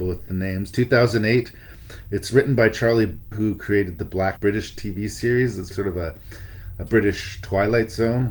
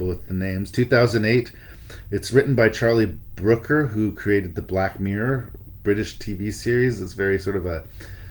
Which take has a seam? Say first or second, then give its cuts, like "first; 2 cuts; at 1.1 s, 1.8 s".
first; 3 cuts; at 3.3 s, 4.4 s, 5.7 s